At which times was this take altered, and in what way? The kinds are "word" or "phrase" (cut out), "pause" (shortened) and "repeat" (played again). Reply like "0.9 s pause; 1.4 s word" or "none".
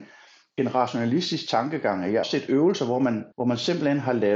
2.2 s phrase; 3.3 s pause